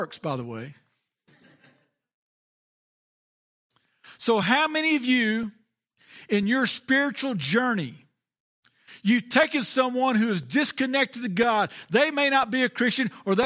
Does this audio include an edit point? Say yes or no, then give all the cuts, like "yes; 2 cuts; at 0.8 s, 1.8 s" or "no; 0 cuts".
no; 0 cuts